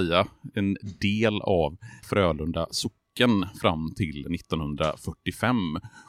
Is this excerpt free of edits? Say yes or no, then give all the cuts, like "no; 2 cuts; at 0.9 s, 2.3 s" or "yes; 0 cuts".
no; 1 cut; at 2.0 s